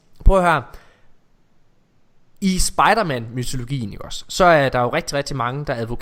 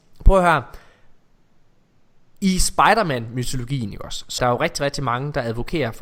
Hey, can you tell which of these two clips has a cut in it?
second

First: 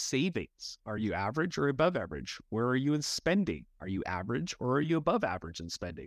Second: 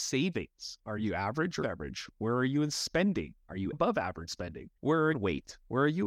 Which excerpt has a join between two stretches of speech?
second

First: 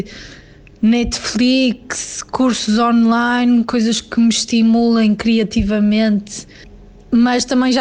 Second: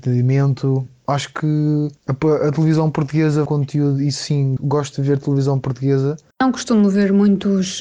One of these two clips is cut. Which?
second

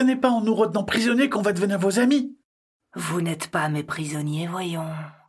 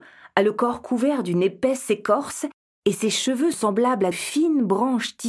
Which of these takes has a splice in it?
second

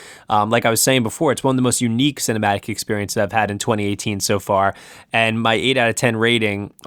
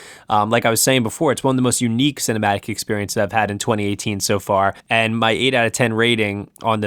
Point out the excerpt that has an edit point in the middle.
second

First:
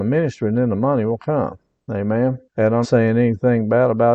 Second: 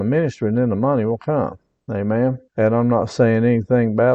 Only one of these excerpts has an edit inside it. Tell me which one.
first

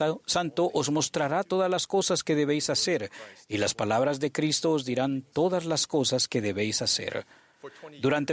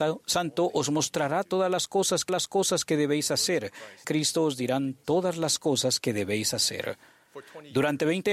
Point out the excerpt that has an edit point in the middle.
second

